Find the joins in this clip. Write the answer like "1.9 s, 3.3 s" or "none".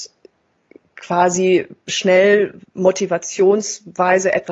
2.6 s